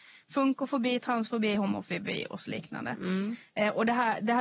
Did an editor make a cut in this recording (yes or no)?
no